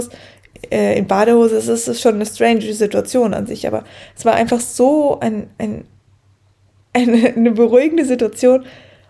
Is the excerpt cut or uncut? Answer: uncut